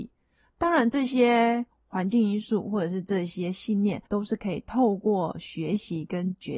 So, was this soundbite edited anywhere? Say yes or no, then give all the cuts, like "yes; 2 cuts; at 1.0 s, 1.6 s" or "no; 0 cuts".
yes; 1 cut; at 4.1 s